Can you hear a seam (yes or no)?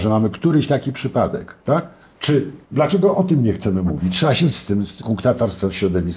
yes